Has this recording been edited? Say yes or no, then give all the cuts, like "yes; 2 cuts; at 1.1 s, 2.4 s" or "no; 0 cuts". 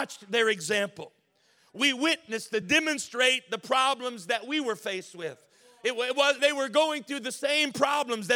yes; 2 cuts; at 2.6 s, 6.4 s